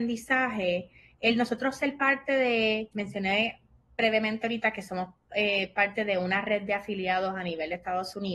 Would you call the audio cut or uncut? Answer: uncut